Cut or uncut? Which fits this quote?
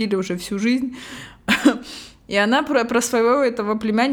uncut